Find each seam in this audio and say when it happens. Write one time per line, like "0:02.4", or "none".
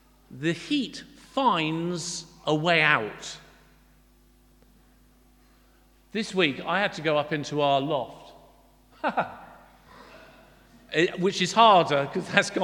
none